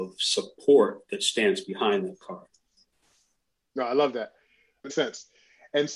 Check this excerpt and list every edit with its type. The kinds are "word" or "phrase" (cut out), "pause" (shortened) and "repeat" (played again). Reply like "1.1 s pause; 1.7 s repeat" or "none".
4.9 s word